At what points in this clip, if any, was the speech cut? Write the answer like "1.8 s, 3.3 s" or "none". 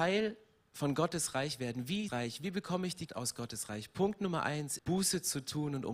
2.1 s, 3.1 s, 4.8 s

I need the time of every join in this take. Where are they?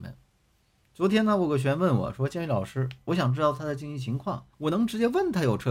4.5 s

